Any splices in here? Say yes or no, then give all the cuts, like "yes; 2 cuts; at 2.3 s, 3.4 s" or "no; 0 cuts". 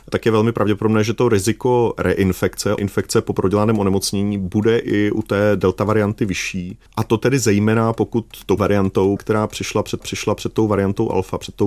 yes; 5 cuts; at 2.8 s, 6.9 s, 8.6 s, 9.2 s, 10.0 s